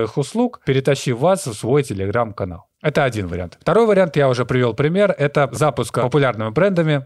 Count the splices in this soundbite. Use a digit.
1